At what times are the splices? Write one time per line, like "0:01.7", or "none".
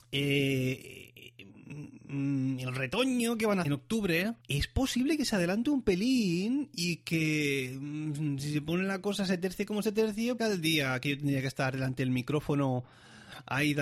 0:03.6
0:04.4
0:10.4